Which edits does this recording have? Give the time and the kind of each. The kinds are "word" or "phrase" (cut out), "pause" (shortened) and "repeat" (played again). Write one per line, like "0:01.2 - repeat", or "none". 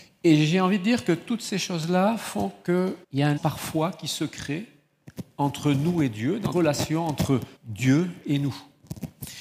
0:03.0 - pause
0:03.4 - word
0:06.5 - word
0:07.6 - pause